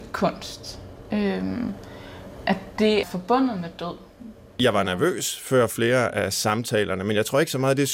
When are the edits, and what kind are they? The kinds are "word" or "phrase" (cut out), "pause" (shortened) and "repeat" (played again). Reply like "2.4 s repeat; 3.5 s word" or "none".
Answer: 3.0 s word